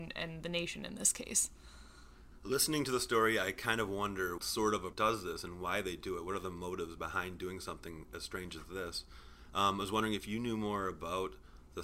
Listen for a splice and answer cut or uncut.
cut